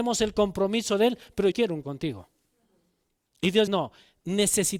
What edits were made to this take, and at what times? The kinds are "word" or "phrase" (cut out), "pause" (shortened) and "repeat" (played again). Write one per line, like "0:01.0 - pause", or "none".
0:01.5 - phrase
0:01.8 - word
0:03.7 - word